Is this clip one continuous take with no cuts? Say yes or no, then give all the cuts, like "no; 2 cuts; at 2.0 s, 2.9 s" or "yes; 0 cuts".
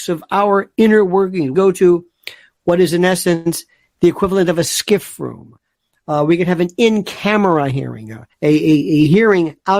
no; 2 cuts; at 1.5 s, 8.3 s